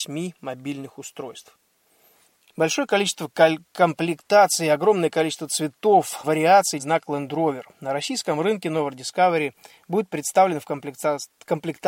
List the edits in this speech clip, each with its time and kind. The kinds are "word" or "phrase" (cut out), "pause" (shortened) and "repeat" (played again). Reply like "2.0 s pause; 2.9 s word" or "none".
2.1 s pause; 6.2 s word; 6.8 s phrase; 7.7 s pause